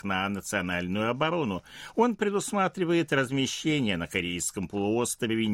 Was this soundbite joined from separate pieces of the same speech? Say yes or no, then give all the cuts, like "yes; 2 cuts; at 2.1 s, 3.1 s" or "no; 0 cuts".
no; 0 cuts